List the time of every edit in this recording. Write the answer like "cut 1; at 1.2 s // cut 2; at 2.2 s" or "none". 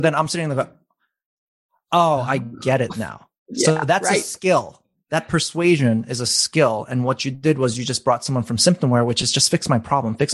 none

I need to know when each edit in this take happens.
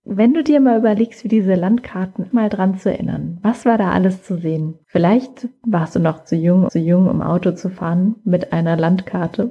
cut 1; at 2.3 s // cut 2; at 4.8 s // cut 3; at 6.7 s

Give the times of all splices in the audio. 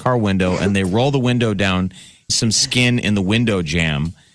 cut 1; at 2.3 s

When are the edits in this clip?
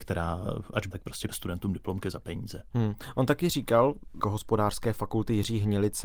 cut 1; at 0.9 s // cut 2; at 1.3 s // cut 3; at 4.2 s

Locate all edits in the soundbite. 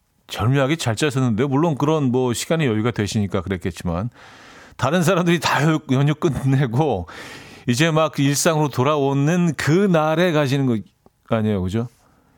none

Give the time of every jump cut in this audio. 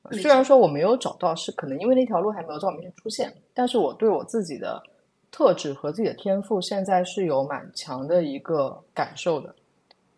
none

